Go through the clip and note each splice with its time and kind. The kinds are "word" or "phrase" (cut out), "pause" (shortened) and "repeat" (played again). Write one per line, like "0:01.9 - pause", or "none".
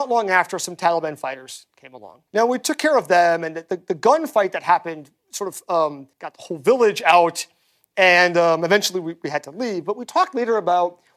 0:02.3 - pause
0:06.1 - pause

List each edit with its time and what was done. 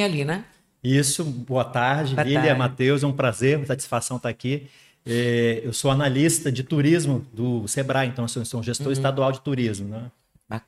none

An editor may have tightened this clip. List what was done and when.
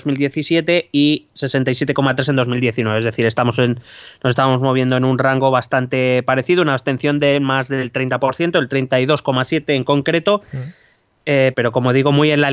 0:11.5 - word

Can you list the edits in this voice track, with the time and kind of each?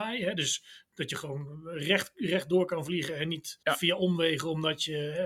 0:03.6 - pause

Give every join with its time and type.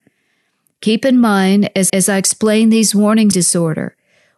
0:01.9 - repeat
0:03.3 - phrase

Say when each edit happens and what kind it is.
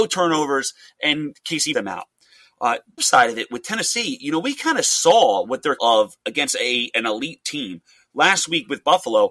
0:01.7 - word
0:03.0 - phrase
0:05.8 - word

